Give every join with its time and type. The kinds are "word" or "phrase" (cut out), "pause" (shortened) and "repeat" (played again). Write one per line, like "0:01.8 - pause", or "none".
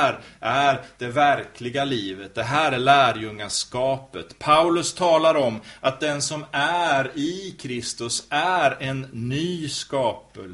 none